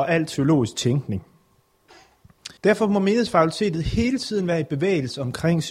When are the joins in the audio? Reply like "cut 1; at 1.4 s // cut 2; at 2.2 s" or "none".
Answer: cut 1; at 2.6 s